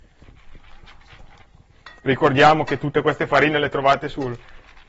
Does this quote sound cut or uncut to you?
uncut